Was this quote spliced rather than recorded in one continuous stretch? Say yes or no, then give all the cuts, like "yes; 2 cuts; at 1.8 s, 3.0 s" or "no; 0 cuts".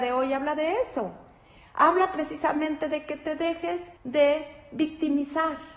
yes; 1 cut; at 4.0 s